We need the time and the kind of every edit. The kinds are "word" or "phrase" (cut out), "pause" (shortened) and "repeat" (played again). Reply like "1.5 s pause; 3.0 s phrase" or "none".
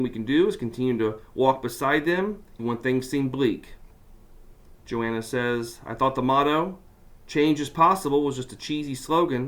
2.6 s word